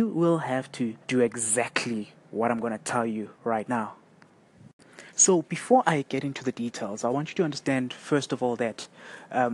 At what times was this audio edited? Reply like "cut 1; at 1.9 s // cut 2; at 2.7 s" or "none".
cut 1; at 1.0 s // cut 2; at 3.4 s // cut 3; at 5.1 s